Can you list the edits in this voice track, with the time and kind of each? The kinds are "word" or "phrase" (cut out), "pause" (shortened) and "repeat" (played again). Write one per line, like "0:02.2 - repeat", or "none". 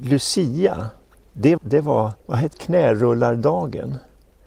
0:01.6 - word
0:02.2 - pause
0:02.5 - word